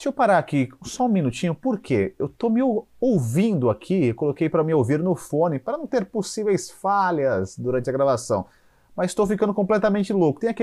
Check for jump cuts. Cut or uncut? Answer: uncut